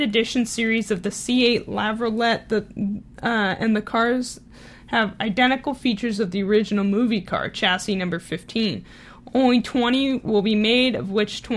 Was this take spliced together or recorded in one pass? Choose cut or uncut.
uncut